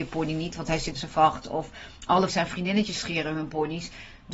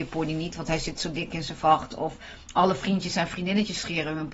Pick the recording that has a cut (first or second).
first